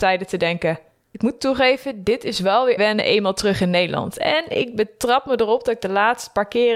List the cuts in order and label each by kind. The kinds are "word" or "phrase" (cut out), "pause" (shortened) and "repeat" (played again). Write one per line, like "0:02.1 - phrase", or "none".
0:02.8 - word